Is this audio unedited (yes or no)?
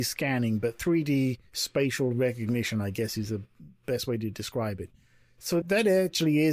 no